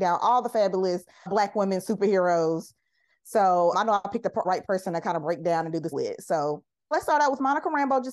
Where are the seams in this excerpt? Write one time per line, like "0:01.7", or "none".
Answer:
0:01.3
0:03.7
0:04.4
0:05.9
0:06.9